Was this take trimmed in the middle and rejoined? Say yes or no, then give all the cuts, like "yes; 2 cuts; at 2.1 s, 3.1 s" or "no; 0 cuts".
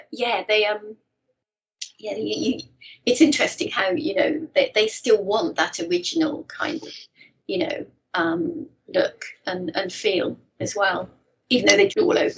no; 0 cuts